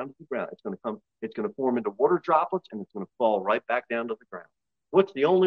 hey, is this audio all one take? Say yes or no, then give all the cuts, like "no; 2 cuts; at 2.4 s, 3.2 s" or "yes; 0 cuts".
yes; 0 cuts